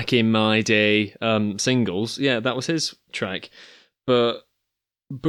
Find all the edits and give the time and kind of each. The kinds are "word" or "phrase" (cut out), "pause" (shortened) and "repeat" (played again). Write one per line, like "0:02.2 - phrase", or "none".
0:03.1 - word